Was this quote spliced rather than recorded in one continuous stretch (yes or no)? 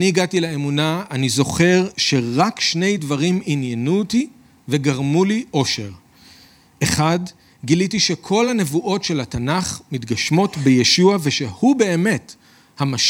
no